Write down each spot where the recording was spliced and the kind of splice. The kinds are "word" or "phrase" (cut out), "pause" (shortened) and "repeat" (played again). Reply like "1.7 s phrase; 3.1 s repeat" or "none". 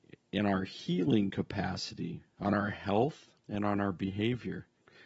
3.4 s pause